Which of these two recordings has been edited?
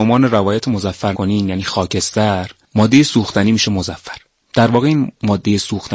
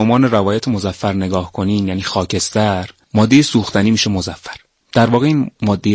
first; 1 cut; at 1.1 s

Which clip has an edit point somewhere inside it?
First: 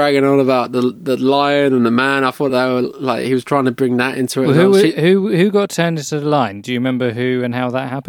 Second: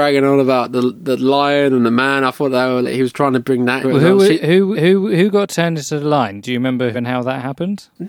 second; 4 cuts; at 2.8 s, 3.8 s, 4.7 s, 6.9 s

